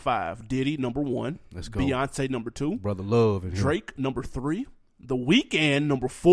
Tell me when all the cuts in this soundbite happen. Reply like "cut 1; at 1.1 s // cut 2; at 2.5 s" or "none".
none